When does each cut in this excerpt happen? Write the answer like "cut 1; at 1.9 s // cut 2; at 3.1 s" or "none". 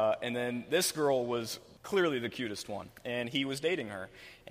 cut 1; at 1.8 s